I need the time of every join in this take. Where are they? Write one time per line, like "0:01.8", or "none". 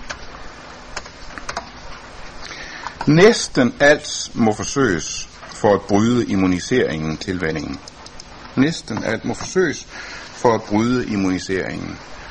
none